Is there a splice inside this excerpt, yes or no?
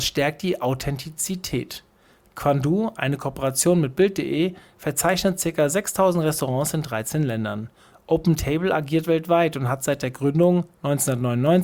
no